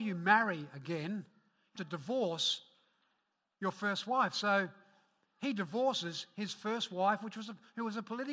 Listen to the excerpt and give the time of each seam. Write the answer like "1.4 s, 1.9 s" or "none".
1.8 s